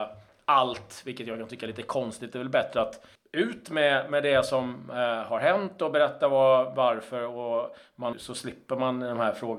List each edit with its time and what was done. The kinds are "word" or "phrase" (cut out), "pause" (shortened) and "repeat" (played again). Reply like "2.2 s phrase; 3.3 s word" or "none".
3.2 s pause; 8.1 s phrase